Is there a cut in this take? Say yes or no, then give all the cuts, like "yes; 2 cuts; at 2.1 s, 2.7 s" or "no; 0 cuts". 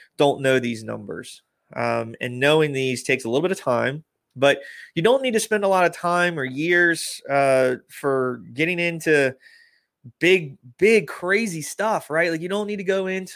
no; 0 cuts